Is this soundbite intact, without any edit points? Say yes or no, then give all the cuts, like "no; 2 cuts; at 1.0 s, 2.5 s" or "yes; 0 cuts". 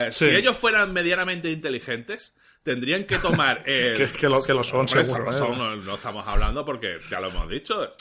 yes; 0 cuts